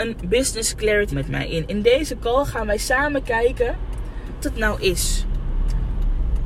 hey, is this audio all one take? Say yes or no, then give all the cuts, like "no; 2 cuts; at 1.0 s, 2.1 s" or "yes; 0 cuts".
no; 2 cuts; at 1.1 s, 4.4 s